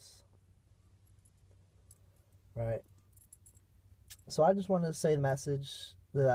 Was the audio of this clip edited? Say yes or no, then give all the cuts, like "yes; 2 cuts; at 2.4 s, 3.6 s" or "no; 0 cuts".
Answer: yes; 1 cut; at 5.2 s